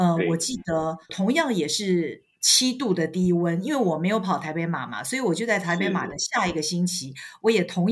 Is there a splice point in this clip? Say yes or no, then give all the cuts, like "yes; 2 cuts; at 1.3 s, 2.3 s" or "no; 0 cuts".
yes; 1 cut; at 1.0 s